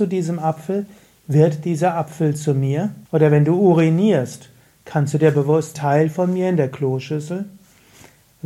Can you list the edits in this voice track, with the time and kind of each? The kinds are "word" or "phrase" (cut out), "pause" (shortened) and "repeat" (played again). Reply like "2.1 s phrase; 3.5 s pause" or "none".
3.1 s pause; 5.7 s phrase